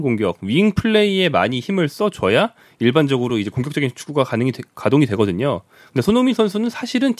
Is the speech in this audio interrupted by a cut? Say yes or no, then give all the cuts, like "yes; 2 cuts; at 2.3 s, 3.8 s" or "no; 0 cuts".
no; 0 cuts